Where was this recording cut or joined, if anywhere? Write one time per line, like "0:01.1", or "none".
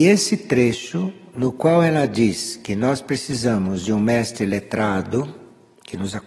none